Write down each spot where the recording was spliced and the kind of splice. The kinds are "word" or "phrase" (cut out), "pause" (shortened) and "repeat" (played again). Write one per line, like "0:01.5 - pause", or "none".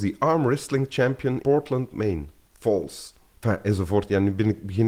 0:01.4 - word